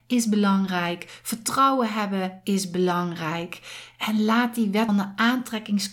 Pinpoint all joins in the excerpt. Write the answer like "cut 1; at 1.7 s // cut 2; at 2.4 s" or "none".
cut 1; at 4.9 s